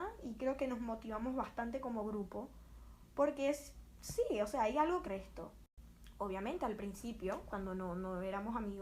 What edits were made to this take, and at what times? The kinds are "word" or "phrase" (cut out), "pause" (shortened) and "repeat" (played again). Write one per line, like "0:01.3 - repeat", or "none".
0:05.0 - phrase